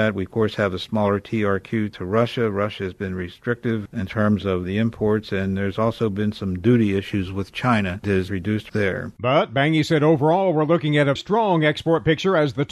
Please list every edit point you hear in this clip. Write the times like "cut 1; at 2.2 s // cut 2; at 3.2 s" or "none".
cut 1; at 8.0 s // cut 2; at 8.7 s // cut 3; at 11.2 s